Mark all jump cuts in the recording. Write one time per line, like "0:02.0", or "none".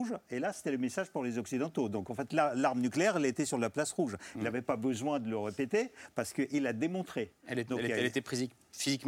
none